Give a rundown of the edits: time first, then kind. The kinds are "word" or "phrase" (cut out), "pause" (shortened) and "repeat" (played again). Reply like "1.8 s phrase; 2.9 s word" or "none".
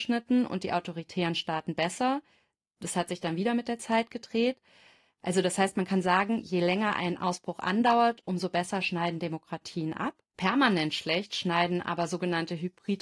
10.3 s pause